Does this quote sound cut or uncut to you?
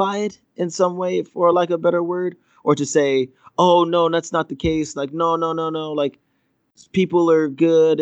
uncut